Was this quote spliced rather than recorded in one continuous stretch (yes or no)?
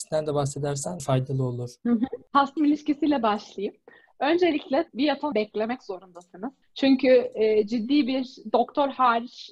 yes